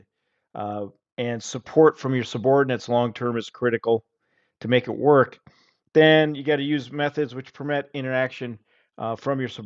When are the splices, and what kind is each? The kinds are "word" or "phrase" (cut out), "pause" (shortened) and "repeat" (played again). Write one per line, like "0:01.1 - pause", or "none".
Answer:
none